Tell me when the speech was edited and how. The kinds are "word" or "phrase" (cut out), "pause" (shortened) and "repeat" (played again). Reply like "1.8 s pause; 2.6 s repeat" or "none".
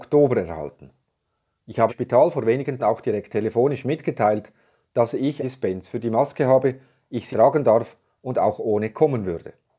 1.9 s word; 2.8 s word; 5.4 s word; 7.3 s word